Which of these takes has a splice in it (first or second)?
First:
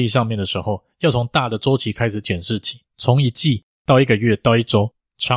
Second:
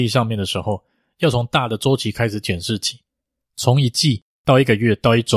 first